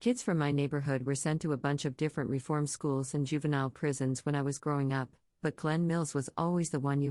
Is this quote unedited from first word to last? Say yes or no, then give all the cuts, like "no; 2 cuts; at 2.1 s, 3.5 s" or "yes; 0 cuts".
yes; 0 cuts